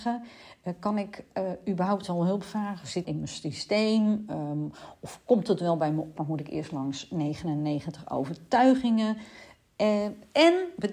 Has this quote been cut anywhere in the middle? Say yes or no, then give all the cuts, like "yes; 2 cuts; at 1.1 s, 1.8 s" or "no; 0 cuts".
yes; 2 cuts; at 3.0 s, 6.2 s